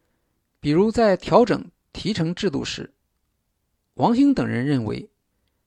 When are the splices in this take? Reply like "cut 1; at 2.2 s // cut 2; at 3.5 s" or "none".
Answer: none